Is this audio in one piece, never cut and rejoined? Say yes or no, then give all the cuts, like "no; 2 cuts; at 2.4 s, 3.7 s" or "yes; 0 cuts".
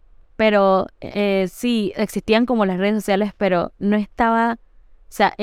yes; 0 cuts